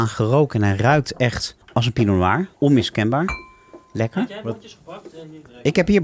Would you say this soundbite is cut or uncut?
cut